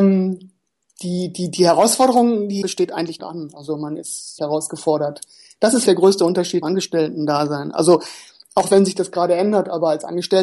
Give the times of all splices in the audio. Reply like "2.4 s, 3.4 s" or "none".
2.6 s, 3.2 s, 4.4 s, 5.9 s, 6.6 s

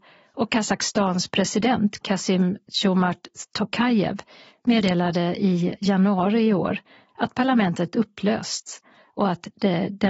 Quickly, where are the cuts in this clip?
none

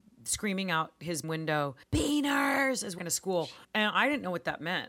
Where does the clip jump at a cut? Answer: 1.2 s, 1.8 s, 3.0 s, 3.6 s

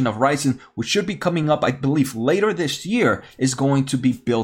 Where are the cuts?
none

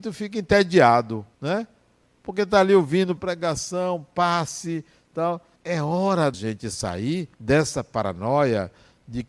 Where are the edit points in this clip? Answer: 1.3 s, 3.2 s, 5.6 s, 6.3 s, 7.3 s

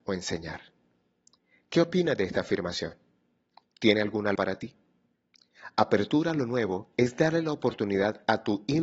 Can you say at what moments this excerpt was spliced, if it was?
4.4 s

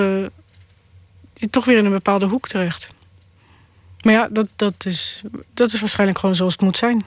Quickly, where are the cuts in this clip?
none

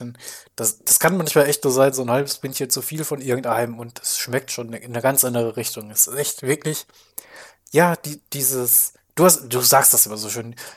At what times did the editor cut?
none

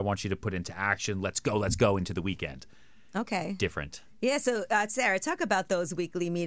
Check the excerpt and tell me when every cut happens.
4.1 s

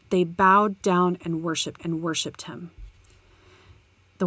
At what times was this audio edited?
1.8 s

